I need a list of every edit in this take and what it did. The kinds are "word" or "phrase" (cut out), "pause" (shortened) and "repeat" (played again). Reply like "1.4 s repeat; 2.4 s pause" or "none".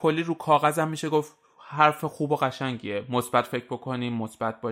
none